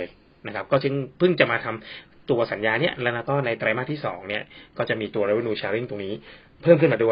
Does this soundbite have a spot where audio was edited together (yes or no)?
no